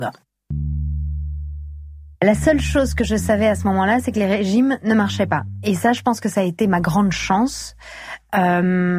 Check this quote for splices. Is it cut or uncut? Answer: cut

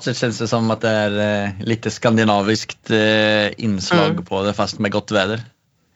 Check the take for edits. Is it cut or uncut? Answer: uncut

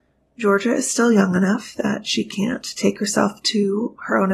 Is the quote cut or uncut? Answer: uncut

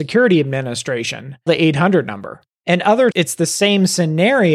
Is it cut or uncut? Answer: cut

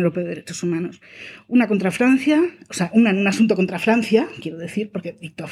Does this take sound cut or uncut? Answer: uncut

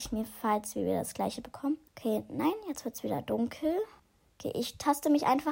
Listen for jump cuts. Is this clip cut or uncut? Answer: cut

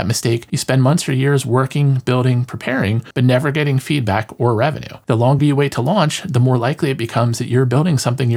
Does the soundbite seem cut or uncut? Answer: uncut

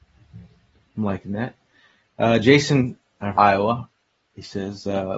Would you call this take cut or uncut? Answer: cut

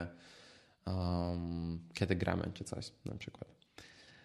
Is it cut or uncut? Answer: uncut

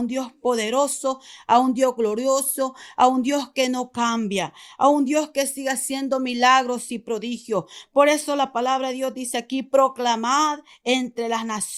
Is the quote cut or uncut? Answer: uncut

